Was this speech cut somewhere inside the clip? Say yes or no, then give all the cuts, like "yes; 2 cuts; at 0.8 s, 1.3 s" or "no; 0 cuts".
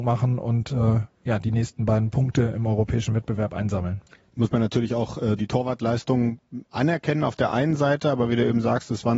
no; 0 cuts